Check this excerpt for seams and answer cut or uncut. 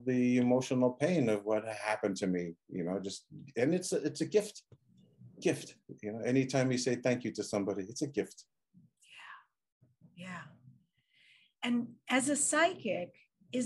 uncut